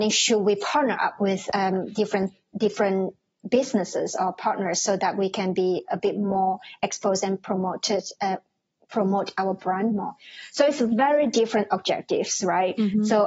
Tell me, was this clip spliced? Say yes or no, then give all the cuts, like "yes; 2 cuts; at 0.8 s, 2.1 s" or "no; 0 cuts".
no; 0 cuts